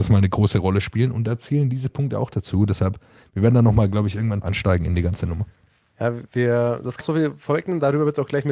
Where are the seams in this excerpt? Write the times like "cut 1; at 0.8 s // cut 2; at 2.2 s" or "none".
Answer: cut 1; at 4.4 s // cut 2; at 7.0 s

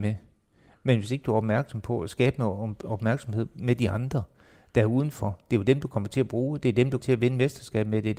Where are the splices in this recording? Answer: cut 1; at 7.0 s

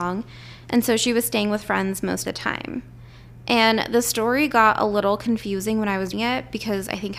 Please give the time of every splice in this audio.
cut 1; at 2.2 s // cut 2; at 6.1 s

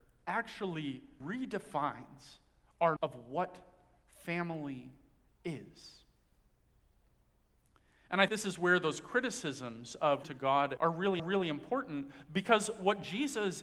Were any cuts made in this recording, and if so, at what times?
cut 1; at 1.2 s // cut 2; at 3.0 s // cut 3; at 8.3 s // cut 4; at 10.2 s // cut 5; at 10.8 s // cut 6; at 11.2 s

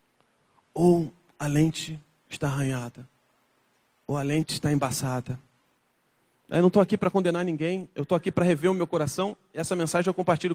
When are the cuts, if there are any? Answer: none

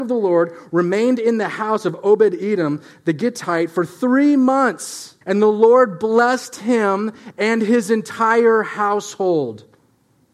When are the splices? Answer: cut 1; at 5.2 s

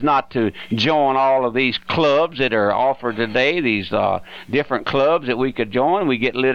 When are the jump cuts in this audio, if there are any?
none

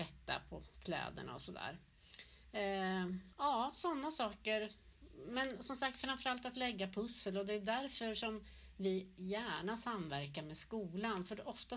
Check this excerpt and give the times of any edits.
cut 1; at 3.3 s

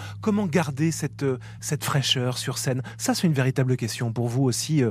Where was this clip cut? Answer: none

